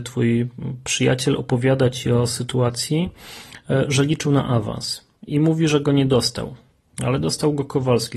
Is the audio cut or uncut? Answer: uncut